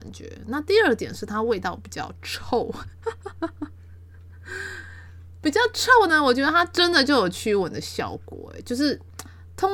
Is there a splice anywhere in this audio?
no; 0 cuts

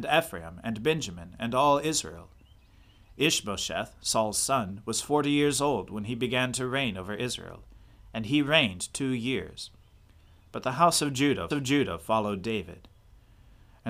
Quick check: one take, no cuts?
no; 1 cut; at 11.5 s

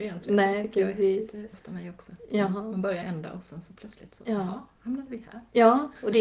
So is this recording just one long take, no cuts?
no; 2 cuts; at 1.5 s, 3.0 s

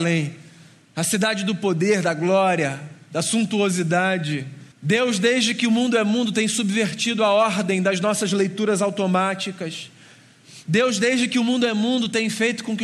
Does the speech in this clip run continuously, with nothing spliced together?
no; 1 cut; at 4.7 s

